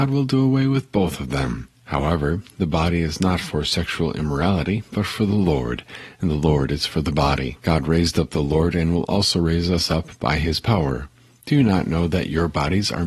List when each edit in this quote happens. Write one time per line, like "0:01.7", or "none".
0:01.8
0:07.6

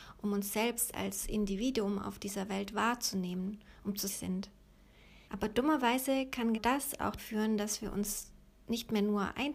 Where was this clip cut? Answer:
0:04.1
0:05.2
0:06.5
0:07.2

